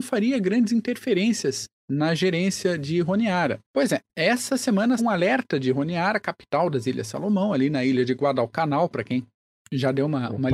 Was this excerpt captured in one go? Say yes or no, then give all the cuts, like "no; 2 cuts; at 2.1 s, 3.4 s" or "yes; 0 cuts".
no; 4 cuts; at 1.8 s, 3.6 s, 4.1 s, 5.0 s